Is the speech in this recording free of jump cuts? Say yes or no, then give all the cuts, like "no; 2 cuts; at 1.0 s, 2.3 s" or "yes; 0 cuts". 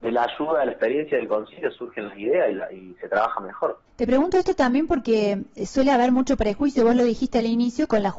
no; 1 cut; at 3.9 s